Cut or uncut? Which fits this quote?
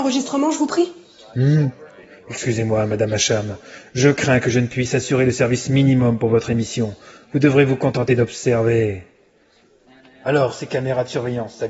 uncut